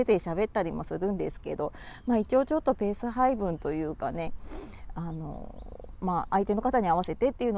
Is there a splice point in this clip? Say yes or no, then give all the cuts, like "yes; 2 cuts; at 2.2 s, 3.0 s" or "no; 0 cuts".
no; 0 cuts